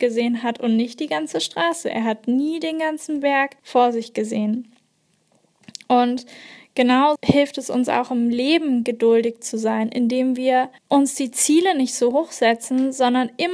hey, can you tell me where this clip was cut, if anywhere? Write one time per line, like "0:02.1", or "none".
0:03.6
0:07.2
0:10.8

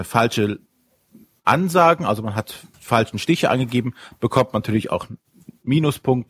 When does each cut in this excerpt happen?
0:02.7

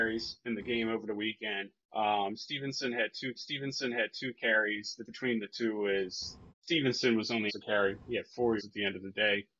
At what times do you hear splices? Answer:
0:01.8
0:03.4
0:05.0
0:06.5
0:07.5
0:08.6

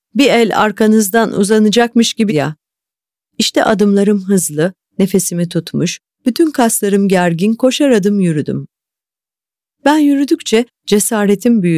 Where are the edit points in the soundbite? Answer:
0:02.3

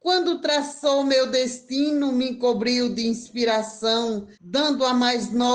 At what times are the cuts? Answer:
0:04.3

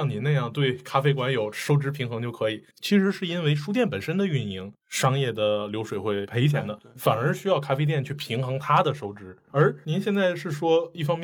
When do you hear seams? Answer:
0:02.7

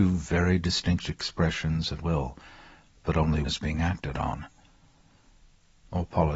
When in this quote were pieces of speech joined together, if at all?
0:02.0
0:03.4

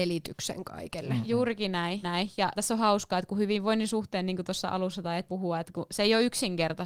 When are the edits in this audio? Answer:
0:02.0
0:02.6
0:05.3

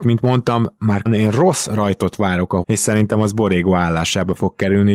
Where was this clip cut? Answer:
0:01.1
0:02.6

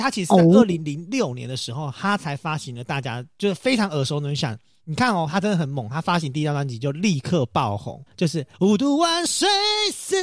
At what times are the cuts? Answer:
0:08.1
0:08.5

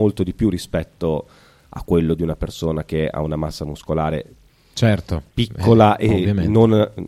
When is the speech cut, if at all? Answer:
none

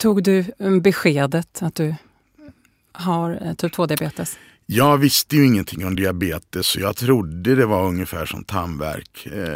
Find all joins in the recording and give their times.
none

